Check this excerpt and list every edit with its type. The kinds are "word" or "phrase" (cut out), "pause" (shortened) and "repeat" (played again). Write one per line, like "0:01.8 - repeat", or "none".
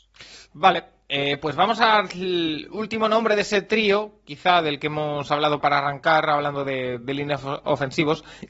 0:05.6 - word